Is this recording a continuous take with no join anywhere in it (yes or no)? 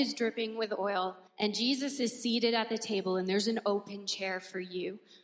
no